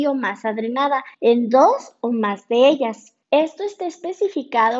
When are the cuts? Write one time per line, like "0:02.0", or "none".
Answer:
0:01.1
0:03.2